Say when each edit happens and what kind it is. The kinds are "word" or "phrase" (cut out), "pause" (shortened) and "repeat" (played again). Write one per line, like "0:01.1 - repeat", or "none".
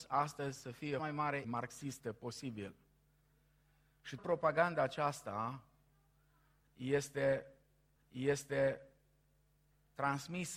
0:01.0 - phrase
0:01.4 - word
0:04.2 - word
0:08.0 - repeat